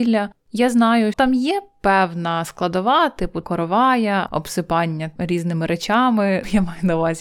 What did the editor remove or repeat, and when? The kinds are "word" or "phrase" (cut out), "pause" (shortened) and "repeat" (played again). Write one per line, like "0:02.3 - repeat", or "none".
0:01.1 - word
0:03.4 - word
0:04.3 - word